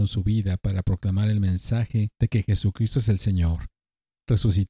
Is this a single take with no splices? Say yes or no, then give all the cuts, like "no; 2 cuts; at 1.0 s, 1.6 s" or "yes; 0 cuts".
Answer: no; 1 cut; at 2.1 s